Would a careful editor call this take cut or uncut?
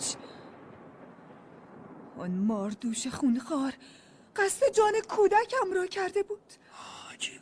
uncut